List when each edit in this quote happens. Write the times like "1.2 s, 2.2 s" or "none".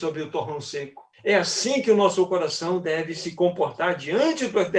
1.1 s

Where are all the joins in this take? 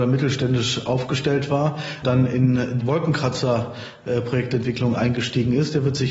2.0 s, 2.8 s

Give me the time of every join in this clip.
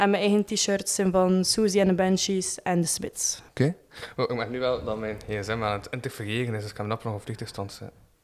3.5 s

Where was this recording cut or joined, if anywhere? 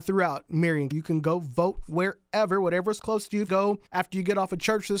0.9 s, 3.5 s, 3.9 s

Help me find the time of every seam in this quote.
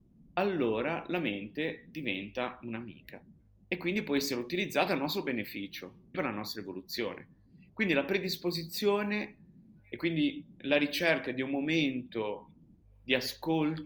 6.1 s

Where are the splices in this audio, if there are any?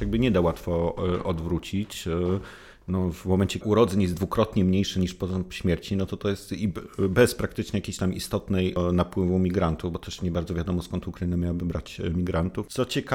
3.6 s

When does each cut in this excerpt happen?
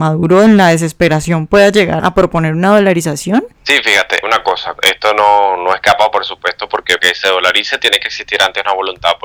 2.0 s, 3.5 s, 4.2 s, 4.8 s, 7.0 s

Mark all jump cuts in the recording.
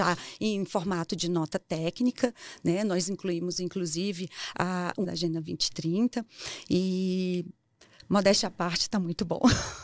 5.0 s

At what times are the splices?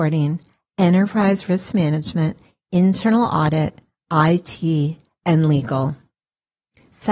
none

